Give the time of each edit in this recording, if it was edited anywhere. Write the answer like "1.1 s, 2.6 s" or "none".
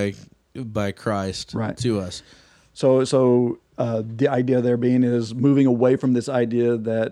none